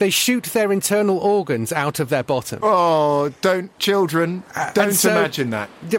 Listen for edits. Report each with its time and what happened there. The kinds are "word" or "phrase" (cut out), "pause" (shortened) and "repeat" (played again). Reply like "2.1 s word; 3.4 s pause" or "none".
none